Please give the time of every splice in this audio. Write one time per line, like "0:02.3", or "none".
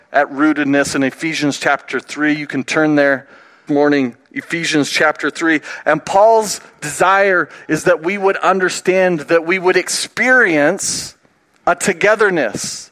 0:03.7